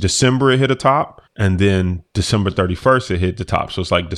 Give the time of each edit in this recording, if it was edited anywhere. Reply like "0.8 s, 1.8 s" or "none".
1.3 s